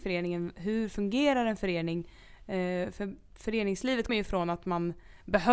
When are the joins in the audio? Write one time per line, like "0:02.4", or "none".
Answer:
0:04.1